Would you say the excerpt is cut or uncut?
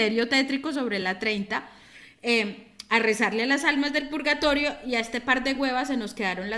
uncut